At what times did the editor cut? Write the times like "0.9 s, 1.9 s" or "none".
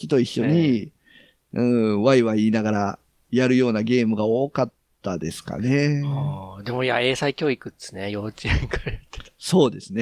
none